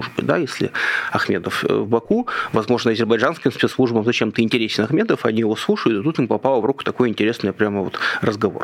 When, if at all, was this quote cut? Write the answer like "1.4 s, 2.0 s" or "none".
none